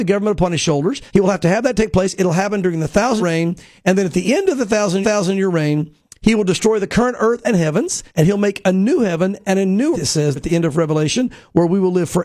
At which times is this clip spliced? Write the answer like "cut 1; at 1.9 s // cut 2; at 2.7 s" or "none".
cut 1; at 1.1 s // cut 2; at 3.2 s // cut 3; at 5.0 s // cut 4; at 8.1 s // cut 5; at 9.9 s // cut 6; at 10.4 s